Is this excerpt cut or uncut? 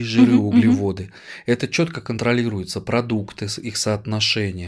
uncut